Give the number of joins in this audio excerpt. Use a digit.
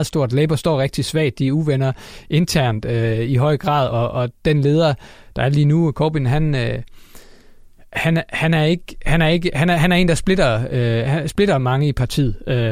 0